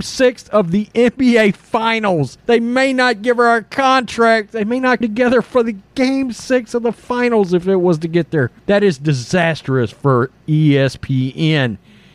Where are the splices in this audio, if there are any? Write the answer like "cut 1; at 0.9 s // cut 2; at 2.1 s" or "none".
cut 1; at 2.4 s // cut 2; at 5.0 s // cut 3; at 8.6 s

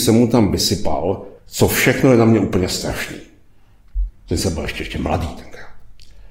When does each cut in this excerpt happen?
cut 1; at 1.4 s

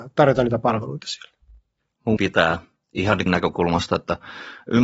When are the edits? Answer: cut 1; at 2.2 s // cut 2; at 3.3 s

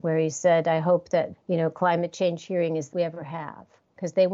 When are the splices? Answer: cut 1; at 1.3 s // cut 2; at 2.9 s

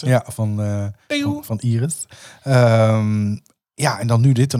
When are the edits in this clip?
none

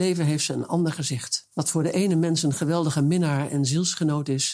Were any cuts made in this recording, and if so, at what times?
cut 1; at 1.5 s

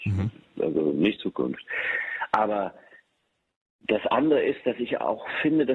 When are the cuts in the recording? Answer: cut 1; at 1.2 s

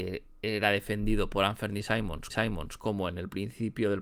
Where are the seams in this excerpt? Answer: cut 1; at 2.3 s

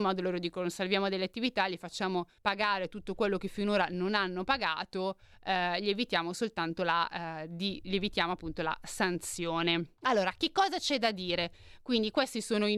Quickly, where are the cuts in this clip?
cut 1; at 2.4 s // cut 2; at 10.0 s

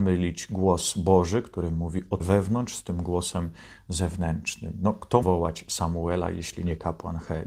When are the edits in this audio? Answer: cut 1; at 2.2 s // cut 2; at 5.2 s

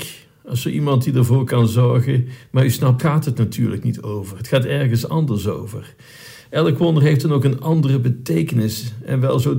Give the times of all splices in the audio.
cut 1; at 3.0 s

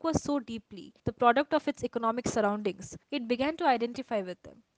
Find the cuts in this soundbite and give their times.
cut 1; at 1.0 s // cut 2; at 3.0 s

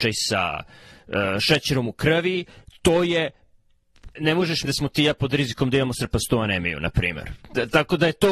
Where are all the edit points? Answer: cut 1; at 4.2 s // cut 2; at 4.7 s

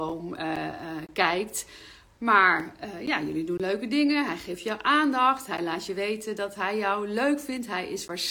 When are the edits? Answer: none

